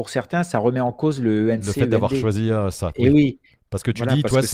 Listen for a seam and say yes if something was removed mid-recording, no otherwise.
no